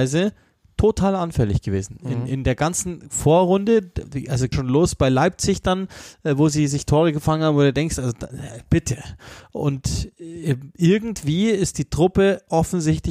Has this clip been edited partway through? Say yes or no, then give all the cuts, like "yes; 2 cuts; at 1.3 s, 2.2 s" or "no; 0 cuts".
yes; 1 cut; at 4.5 s